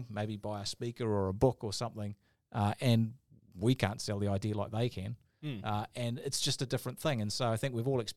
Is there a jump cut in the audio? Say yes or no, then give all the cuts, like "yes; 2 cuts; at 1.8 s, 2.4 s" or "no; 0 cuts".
no; 0 cuts